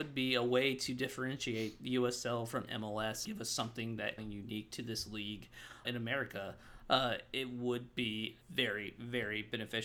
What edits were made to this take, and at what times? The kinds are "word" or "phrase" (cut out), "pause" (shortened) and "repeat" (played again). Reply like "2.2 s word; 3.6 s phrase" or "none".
3.2 s word; 4.2 s phrase; 5.8 s word; 8.4 s pause